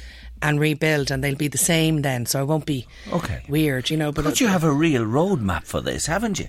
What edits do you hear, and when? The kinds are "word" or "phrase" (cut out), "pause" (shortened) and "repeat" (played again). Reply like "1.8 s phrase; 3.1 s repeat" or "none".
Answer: none